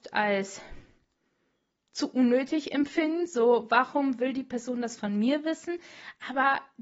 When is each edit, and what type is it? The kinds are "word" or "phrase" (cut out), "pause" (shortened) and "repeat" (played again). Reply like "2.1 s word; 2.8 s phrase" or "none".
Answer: none